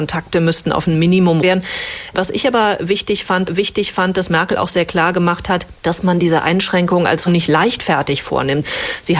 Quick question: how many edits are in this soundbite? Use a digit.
4